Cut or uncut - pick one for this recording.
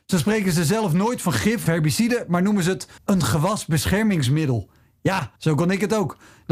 cut